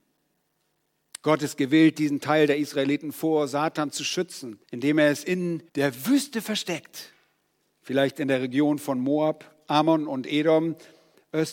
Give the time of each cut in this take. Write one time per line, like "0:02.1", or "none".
0:04.6
0:05.7